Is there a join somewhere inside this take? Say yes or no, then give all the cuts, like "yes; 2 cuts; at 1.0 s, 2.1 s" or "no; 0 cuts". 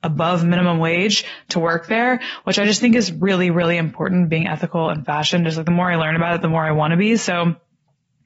no; 0 cuts